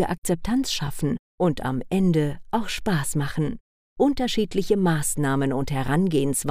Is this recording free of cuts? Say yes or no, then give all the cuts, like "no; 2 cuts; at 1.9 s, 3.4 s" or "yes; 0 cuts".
no; 1 cut; at 3.7 s